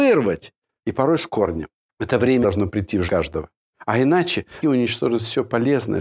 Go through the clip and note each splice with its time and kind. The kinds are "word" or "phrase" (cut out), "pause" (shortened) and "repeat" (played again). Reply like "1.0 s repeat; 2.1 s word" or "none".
2.4 s word; 3.1 s word; 4.6 s word